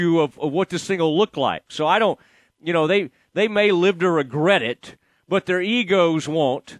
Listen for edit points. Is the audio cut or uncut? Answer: uncut